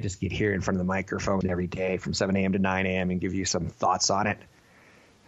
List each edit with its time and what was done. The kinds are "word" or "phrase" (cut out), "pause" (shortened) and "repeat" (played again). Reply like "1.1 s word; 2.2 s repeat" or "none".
1.4 s word